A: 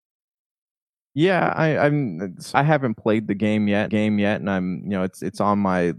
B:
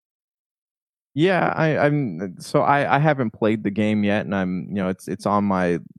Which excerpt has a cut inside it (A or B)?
A